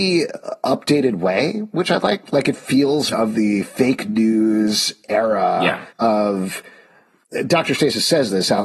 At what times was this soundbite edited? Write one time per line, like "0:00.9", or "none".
0:03.1
0:05.9